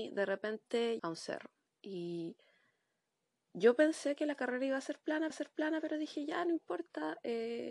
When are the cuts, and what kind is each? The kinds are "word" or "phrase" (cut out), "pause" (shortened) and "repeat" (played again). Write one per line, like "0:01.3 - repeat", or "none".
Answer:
0:01.0 - word
0:01.7 - pause
0:05.3 - repeat